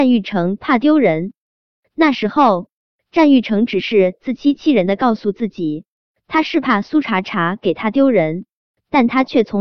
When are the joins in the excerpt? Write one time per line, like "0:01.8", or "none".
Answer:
none